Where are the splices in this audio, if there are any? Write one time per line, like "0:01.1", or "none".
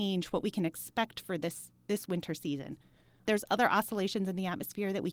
none